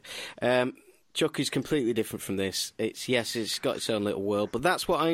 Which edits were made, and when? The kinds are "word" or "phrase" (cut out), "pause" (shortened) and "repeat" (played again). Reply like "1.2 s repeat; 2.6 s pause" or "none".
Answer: none